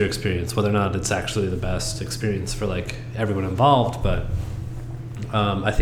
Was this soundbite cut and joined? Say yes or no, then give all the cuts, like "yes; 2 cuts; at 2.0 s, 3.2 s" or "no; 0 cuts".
no; 0 cuts